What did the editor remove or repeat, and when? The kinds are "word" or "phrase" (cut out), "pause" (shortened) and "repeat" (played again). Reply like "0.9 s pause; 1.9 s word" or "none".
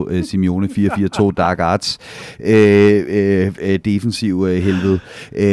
none

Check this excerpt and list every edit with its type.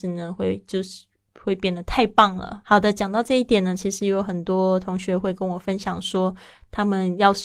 2.6 s pause

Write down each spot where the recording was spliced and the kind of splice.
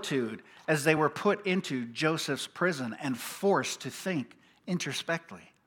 none

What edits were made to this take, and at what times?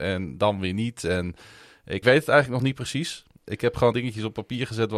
2.0 s phrase; 3.9 s word

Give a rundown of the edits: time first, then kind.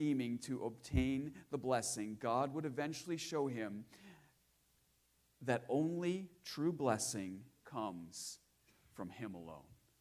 none

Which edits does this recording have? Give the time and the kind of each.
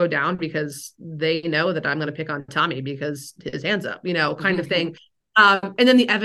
none

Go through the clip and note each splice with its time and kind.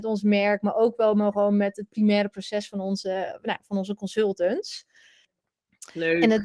none

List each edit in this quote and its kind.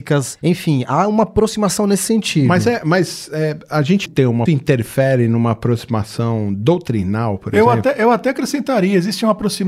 4.1 s word; 4.5 s phrase

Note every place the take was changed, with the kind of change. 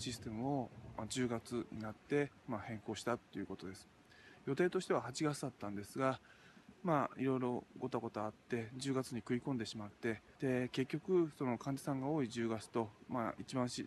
10.3 s pause

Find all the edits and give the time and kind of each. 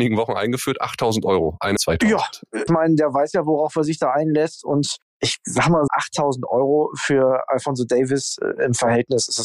1.8 s phrase; 2.7 s word; 5.9 s word

